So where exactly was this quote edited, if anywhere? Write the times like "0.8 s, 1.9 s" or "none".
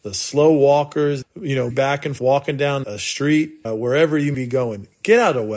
1.2 s, 1.7 s, 2.2 s, 2.8 s, 3.6 s, 4.3 s

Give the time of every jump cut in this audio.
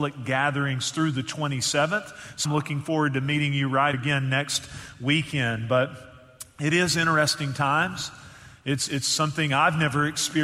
2.5 s, 3.9 s, 8.9 s

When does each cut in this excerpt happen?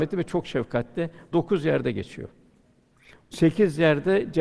none

